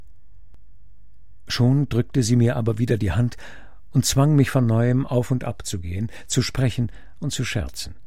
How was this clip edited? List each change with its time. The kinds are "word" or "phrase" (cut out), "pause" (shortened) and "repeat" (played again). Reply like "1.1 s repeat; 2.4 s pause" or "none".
none